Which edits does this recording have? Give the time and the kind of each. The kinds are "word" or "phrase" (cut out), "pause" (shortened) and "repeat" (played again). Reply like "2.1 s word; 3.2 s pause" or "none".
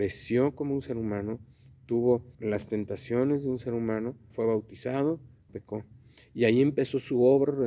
2.3 s pause; 4.3 s word; 5.5 s phrase

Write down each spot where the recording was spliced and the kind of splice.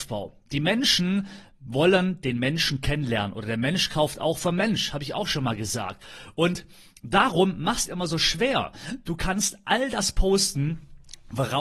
7.9 s phrase

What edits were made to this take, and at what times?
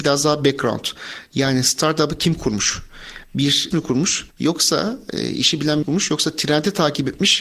3.7 s word; 4.3 s pause; 5.8 s phrase

